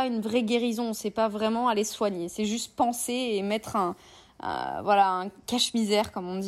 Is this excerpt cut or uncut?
uncut